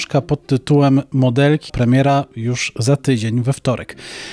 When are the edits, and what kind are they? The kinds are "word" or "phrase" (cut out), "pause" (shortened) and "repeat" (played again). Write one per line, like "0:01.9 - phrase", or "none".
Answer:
0:01.7 - phrase